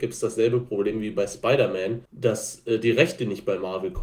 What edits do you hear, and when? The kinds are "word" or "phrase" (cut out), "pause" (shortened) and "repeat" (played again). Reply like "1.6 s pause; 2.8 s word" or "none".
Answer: 2.1 s pause